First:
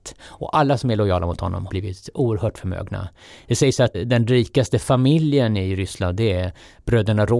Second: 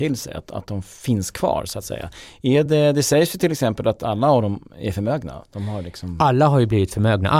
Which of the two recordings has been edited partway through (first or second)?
first